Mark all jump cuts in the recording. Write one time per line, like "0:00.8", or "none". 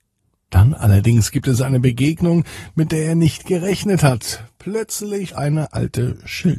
0:05.3

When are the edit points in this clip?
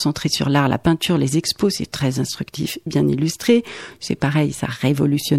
0:02.9

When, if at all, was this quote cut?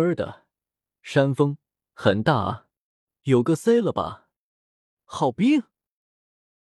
none

